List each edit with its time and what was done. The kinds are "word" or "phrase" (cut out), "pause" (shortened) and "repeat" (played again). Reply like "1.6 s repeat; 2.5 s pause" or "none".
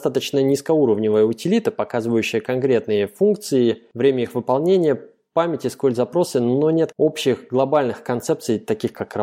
6.9 s word